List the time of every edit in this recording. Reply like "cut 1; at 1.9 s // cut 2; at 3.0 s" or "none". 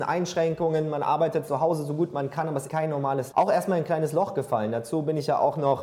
cut 1; at 1.5 s // cut 2; at 2.7 s // cut 3; at 3.3 s